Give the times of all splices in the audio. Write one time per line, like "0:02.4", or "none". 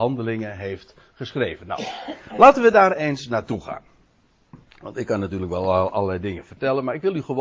none